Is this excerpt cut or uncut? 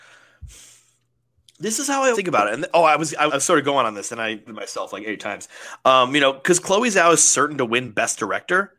cut